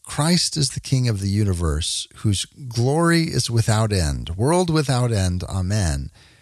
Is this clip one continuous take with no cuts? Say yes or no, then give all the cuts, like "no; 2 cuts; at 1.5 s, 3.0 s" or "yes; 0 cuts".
yes; 0 cuts